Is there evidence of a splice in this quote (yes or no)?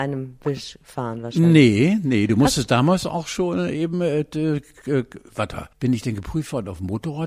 yes